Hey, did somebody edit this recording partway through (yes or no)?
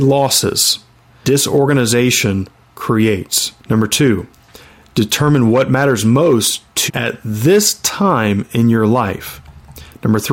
yes